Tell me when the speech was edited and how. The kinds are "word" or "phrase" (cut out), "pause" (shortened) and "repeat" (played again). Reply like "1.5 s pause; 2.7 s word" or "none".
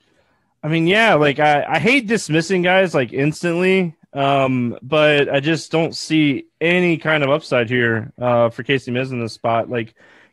none

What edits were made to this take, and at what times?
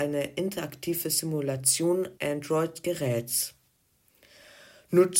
2.2 s word

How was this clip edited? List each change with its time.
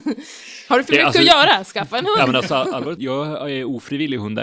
3.0 s word

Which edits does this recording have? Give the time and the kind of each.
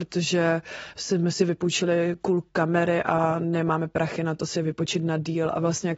2.5 s pause

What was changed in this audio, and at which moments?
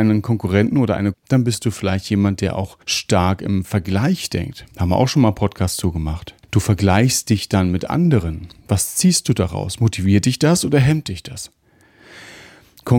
1.1 s phrase; 2.8 s pause; 4.7 s pause; 6.4 s pause

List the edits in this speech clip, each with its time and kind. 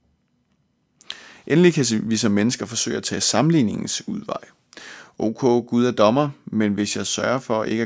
none

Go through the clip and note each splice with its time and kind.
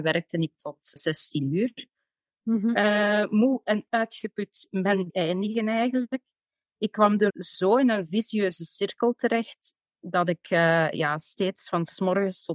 1.0 s word; 5.1 s word; 7.3 s phrase

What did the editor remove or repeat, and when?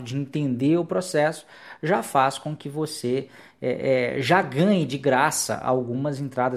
none

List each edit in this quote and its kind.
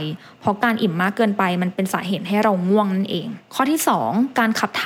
3.4 s pause

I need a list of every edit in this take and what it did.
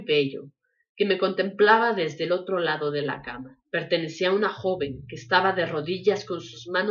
3.6 s pause

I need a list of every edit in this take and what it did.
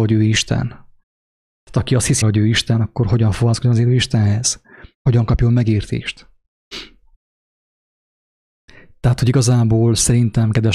2.2 s word

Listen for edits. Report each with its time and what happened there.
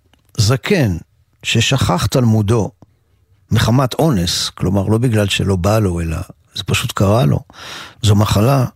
none

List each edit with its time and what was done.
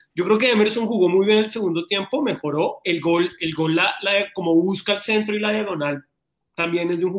none

